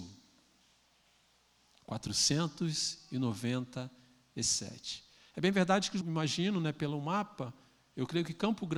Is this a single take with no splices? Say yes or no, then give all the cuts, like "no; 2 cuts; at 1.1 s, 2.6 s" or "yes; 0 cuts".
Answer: no; 1 cut; at 6.0 s